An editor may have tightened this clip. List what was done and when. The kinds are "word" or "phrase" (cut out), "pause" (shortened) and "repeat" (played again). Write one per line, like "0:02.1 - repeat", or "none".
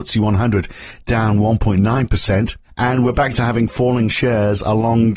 none